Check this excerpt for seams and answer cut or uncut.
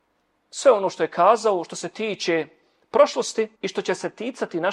cut